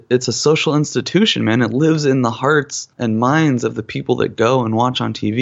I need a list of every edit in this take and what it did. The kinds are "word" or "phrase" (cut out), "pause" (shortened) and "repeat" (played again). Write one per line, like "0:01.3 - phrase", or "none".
0:02.9 - pause